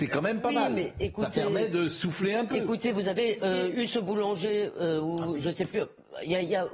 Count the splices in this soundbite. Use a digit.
0